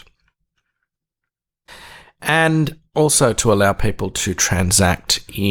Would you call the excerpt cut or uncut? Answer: uncut